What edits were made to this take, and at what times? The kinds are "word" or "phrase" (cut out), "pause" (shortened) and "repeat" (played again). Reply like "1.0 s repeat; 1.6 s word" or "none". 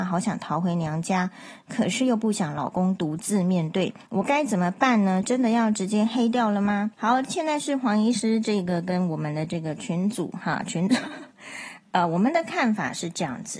4.0 s pause; 6.9 s pause